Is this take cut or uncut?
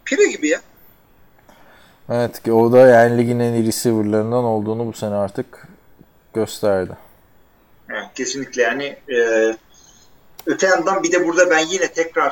cut